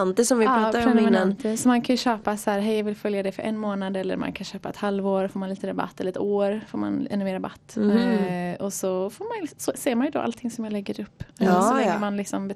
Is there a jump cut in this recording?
yes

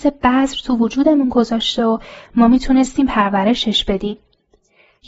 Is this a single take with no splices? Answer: yes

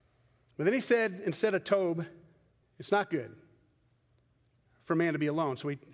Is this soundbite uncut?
no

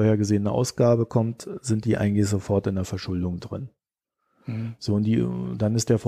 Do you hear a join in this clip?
no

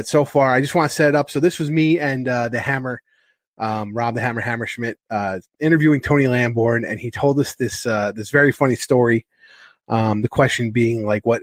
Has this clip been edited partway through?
no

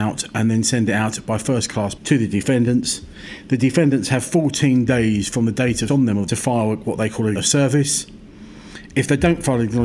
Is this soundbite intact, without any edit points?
no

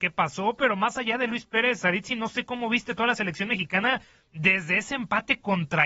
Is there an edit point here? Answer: no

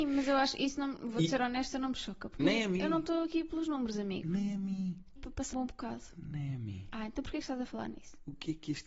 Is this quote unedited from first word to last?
no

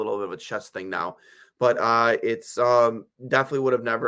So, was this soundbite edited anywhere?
no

